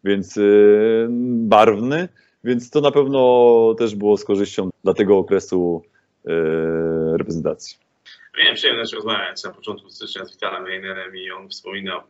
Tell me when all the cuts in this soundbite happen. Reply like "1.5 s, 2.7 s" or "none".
4.7 s